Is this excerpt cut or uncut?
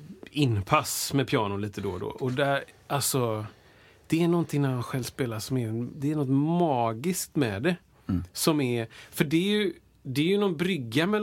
uncut